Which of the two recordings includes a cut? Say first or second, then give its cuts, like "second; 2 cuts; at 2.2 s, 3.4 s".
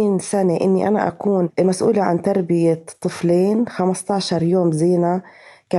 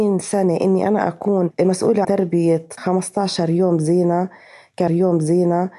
second; 3 cuts; at 2.0 s, 2.8 s, 4.9 s